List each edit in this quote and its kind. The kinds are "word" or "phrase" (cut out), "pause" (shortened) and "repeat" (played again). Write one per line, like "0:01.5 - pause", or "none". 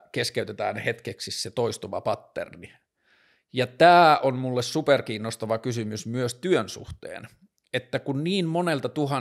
none